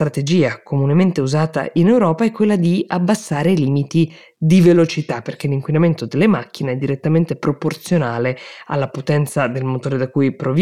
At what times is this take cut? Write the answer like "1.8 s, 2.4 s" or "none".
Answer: none